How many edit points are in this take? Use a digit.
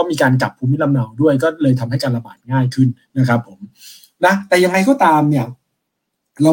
0